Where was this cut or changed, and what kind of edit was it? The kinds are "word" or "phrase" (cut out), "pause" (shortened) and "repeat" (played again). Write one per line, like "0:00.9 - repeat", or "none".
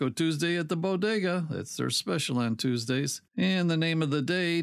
0:03.3 - pause